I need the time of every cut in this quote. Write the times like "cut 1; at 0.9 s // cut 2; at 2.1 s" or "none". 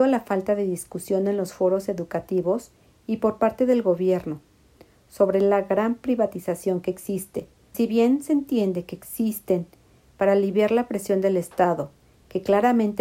cut 1; at 7.7 s

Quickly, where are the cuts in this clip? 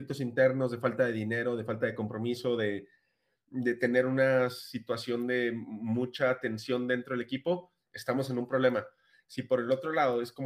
none

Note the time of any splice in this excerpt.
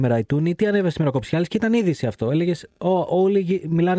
none

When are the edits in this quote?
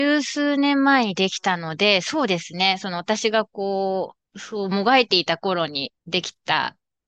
cut 1; at 4.2 s // cut 2; at 6.0 s

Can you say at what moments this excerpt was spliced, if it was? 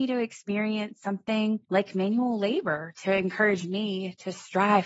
cut 1; at 1.6 s

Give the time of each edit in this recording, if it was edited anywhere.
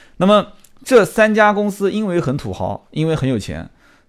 none

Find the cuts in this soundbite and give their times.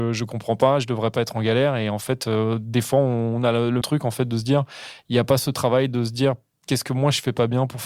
cut 1; at 3.8 s

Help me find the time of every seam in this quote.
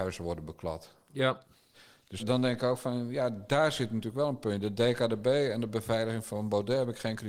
cut 1; at 2.2 s

